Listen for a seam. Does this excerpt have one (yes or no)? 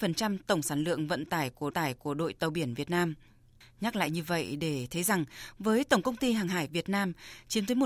yes